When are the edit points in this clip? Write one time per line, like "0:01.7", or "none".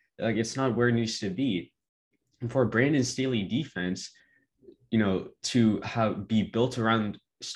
none